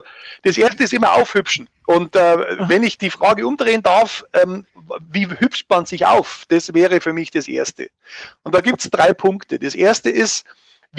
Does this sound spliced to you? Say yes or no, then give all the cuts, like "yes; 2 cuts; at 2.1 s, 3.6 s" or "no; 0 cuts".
no; 0 cuts